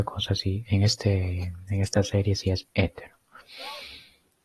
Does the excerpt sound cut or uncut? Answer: uncut